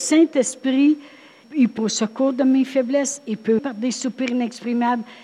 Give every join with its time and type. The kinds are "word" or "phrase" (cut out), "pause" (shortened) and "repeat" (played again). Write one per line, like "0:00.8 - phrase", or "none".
0:01.4 - word
0:01.8 - word
0:03.6 - word